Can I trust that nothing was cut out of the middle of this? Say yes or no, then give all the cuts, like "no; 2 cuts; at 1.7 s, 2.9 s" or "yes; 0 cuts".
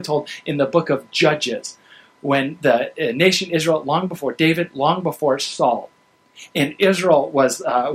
yes; 0 cuts